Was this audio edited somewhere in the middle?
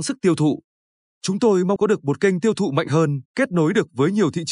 yes; 2 cuts; at 1.8 s, 3.3 s

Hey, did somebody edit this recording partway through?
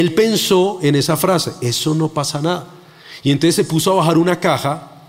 no; 0 cuts

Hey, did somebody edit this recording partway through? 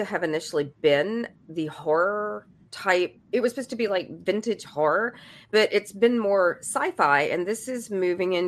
no; 0 cuts

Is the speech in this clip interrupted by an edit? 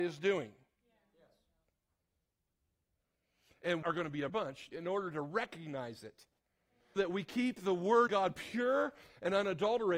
yes; 5 cuts; at 3.8 s, 4.3 s, 4.7 s, 7.0 s, 8.1 s

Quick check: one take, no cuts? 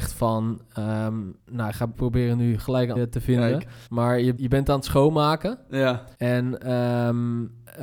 no; 6 cuts; at 1.4 s, 1.9 s, 3.0 s, 3.9 s, 4.4 s, 6.1 s

